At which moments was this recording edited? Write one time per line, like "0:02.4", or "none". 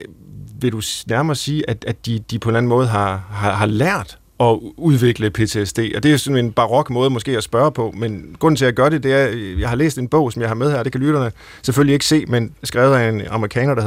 none